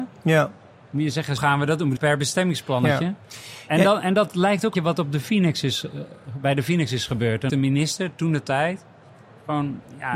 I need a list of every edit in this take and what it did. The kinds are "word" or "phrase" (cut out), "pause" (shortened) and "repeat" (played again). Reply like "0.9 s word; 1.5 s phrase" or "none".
1.4 s word; 2.0 s word; 4.7 s word; 7.5 s word